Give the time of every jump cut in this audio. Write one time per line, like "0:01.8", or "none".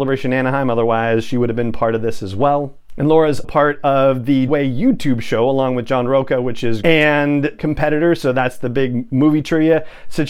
0:03.4
0:04.5
0:06.8
0:07.6